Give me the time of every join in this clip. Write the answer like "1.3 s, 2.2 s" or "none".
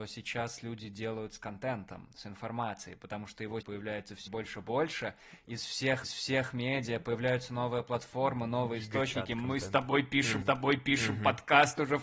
3.6 s, 4.3 s, 6.0 s, 10.4 s